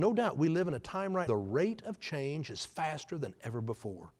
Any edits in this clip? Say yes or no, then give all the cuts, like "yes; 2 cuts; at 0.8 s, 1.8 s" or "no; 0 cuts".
yes; 1 cut; at 1.3 s